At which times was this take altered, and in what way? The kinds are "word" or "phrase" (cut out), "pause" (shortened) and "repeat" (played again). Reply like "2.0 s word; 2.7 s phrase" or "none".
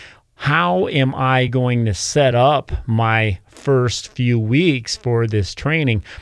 none